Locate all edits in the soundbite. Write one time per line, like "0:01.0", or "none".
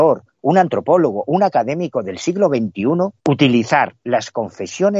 0:03.2